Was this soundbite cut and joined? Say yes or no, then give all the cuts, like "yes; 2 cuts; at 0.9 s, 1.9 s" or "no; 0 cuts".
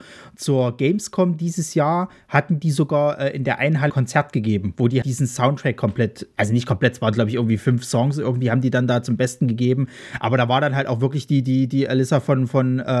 yes; 2 cuts; at 3.9 s, 5.0 s